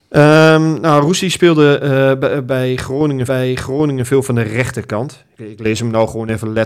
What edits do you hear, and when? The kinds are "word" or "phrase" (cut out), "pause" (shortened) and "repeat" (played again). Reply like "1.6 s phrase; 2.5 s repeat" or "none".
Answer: 3.3 s repeat; 5.3 s pause